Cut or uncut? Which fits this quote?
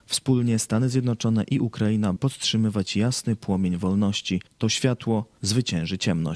cut